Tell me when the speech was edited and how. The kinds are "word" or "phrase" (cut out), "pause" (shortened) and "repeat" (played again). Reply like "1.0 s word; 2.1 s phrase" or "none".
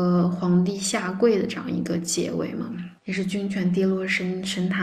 3.0 s pause

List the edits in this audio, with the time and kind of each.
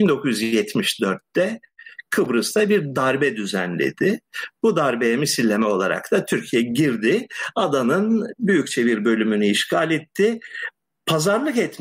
none

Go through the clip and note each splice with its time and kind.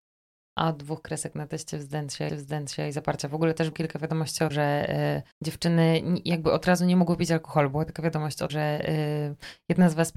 2.3 s repeat; 3.7 s word; 4.5 s word; 5.3 s pause; 8.5 s word

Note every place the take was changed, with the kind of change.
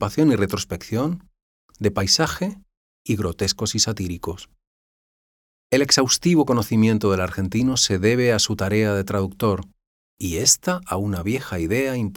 none

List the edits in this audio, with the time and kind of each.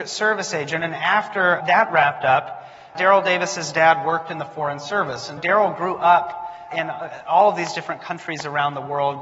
1.6 s word; 2.9 s word; 5.4 s word; 6.7 s word

